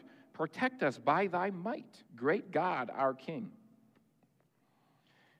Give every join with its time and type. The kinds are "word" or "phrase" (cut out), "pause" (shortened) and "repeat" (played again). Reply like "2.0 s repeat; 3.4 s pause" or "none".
2.1 s pause